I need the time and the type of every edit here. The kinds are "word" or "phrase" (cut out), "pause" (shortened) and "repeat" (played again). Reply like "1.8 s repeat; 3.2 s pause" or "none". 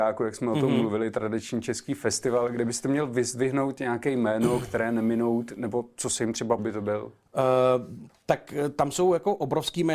6.6 s phrase